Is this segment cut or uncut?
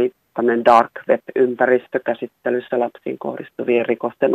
uncut